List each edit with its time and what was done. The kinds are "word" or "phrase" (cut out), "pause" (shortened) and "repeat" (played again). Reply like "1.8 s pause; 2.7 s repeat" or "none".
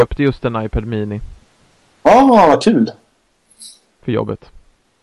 none